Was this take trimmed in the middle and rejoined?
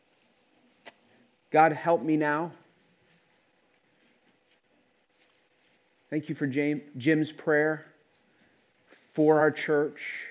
no; 0 cuts

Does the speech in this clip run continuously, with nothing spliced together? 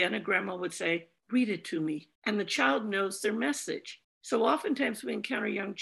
no; 3 cuts; at 1.2 s, 2.2 s, 4.0 s

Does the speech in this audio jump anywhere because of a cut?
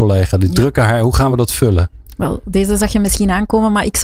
no; 0 cuts

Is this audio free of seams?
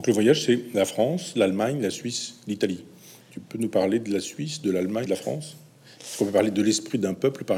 no; 1 cut; at 5.1 s

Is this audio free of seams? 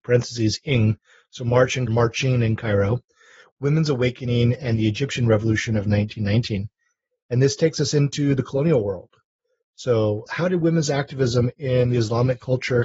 no; 2 cuts; at 1.9 s, 10.3 s

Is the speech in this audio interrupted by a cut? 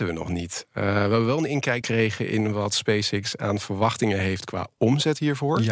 yes; 1 cut; at 1.8 s

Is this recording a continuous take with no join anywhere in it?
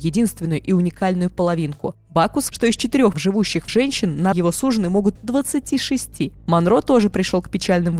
no; 5 cuts; at 2.5 s, 3.1 s, 3.7 s, 4.3 s, 5.2 s

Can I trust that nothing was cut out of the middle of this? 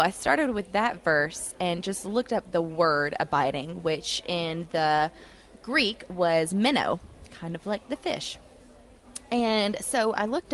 yes; 0 cuts

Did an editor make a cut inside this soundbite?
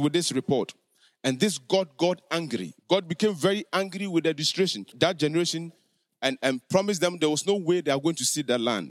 yes; 1 cut; at 4.9 s

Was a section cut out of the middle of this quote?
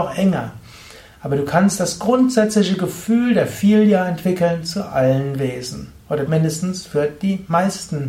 yes; 1 cut; at 6.3 s

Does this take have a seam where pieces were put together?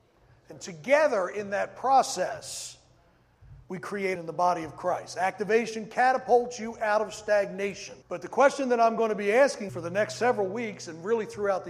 yes; 4 cuts; at 3.6 s, 4.2 s, 8.0 s, 9.7 s

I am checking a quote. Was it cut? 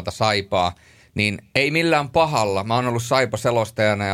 no; 0 cuts

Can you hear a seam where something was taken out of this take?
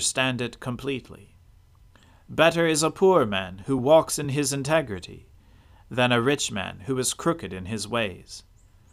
no; 0 cuts

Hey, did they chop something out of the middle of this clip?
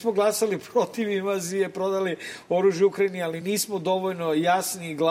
no; 0 cuts

